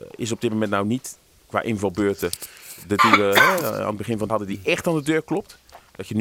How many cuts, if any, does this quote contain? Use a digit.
2